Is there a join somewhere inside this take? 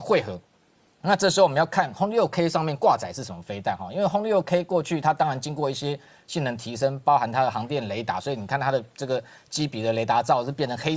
no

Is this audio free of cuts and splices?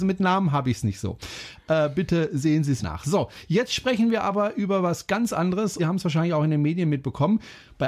no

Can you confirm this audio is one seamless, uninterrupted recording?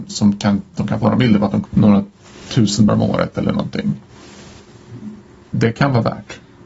no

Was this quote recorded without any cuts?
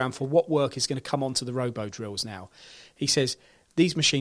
yes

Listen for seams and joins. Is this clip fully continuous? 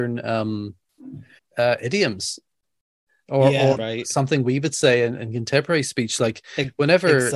no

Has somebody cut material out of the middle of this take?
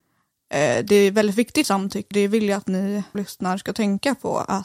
yes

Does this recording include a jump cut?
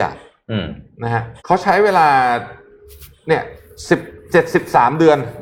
yes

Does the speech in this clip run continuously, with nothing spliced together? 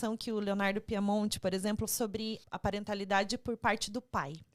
no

